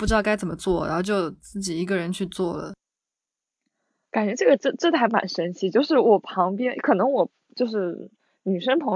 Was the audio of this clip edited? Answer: no; 0 cuts

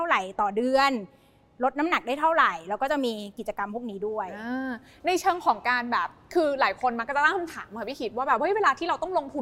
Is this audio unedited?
yes; 0 cuts

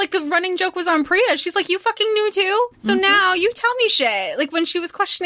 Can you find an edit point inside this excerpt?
yes; 1 cut; at 2.7 s

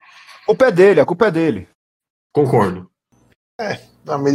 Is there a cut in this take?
no; 0 cuts

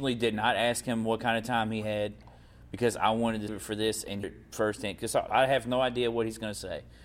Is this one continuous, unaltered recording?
no; 3 cuts; at 3.5 s, 4.2 s, 5.3 s

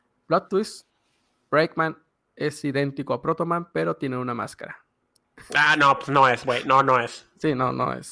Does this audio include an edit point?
no; 0 cuts

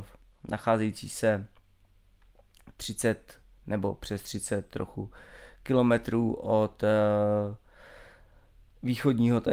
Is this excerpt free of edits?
yes; 0 cuts

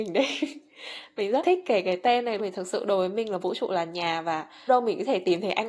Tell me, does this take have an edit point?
yes; 3 cuts; at 1.4 s, 2.4 s, 4.7 s

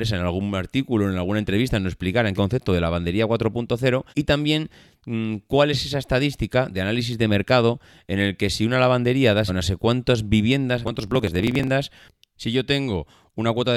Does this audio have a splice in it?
yes; 4 cuts; at 2.4 s, 4.1 s, 9.5 s, 10.8 s

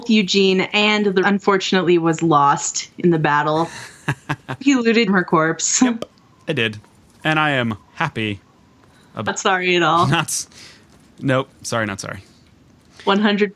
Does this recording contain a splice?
yes; 5 cuts; at 1.2 s, 4.6 s, 5.1 s, 7.9 s, 9.3 s

